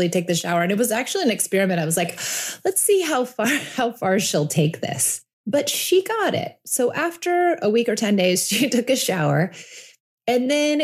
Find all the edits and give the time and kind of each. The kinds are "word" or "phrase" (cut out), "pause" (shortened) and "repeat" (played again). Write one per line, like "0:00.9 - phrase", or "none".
0:05.3 - pause